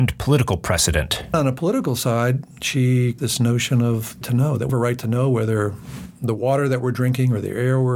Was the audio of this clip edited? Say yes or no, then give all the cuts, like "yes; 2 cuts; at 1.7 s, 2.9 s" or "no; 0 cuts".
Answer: yes; 3 cuts; at 3.2 s, 4.2 s, 4.7 s